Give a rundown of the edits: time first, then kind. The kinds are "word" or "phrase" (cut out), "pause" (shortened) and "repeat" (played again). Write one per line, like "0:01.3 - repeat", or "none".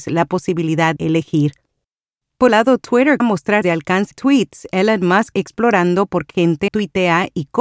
0:01.0 - word
0:02.5 - word
0:03.2 - word
0:03.6 - word
0:04.1 - word
0:05.3 - word
0:06.3 - word
0:06.7 - word